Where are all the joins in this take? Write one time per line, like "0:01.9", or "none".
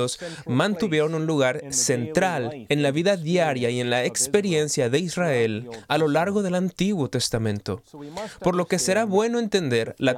none